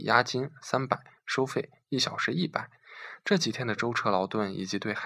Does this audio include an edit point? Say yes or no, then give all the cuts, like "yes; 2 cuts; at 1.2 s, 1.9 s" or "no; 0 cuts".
no; 0 cuts